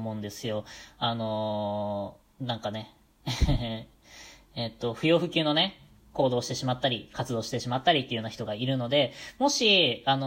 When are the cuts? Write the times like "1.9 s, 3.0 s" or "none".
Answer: none